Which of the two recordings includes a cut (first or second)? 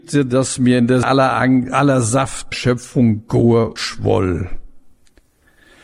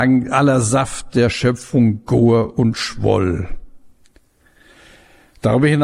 first